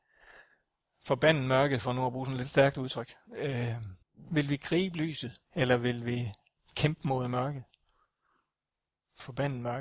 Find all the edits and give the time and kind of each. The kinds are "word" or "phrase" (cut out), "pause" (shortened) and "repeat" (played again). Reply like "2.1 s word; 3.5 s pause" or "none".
4.0 s pause; 5.4 s pause; 6.6 s pause